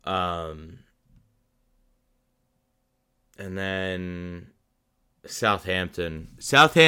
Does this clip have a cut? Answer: no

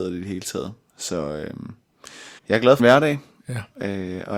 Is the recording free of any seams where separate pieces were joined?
no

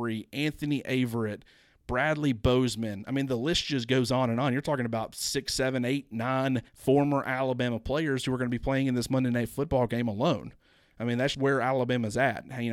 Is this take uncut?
no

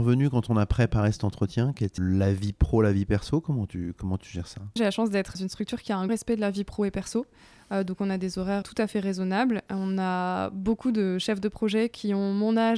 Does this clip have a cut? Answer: yes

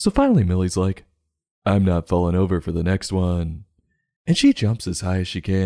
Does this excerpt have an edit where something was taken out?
no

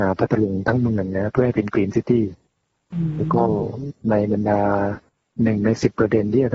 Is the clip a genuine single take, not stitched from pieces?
yes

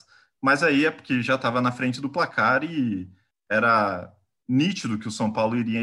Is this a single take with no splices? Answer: yes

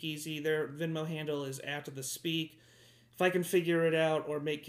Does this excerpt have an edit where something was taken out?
no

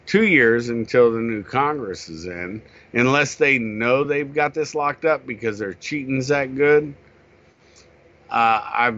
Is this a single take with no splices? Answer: yes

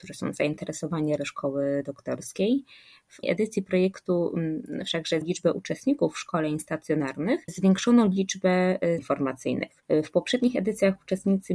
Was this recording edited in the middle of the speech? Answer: yes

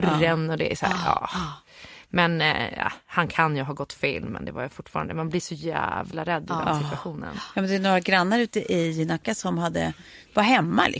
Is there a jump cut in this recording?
no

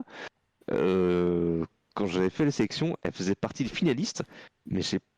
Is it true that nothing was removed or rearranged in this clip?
yes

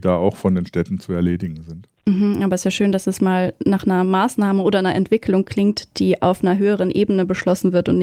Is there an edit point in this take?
no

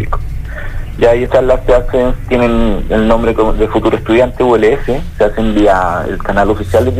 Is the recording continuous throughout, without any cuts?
no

